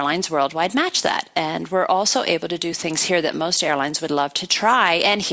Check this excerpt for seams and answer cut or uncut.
uncut